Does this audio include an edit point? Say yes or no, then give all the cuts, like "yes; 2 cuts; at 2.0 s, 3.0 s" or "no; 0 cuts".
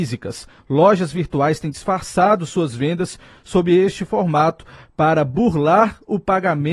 no; 0 cuts